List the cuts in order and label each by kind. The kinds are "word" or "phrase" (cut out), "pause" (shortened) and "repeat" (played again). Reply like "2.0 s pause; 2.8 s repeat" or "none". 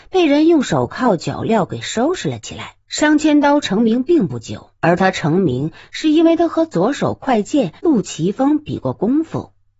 2.8 s pause; 4.8 s pause; 7.8 s pause